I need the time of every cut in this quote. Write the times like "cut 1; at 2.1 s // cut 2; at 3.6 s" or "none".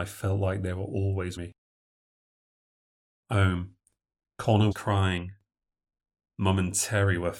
cut 1; at 1.4 s // cut 2; at 3.3 s // cut 3; at 4.7 s